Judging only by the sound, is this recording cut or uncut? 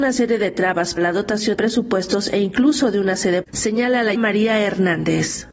cut